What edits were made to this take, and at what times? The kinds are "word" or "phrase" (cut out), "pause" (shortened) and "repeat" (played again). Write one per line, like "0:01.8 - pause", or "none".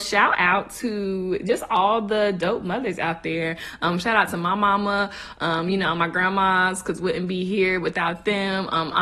none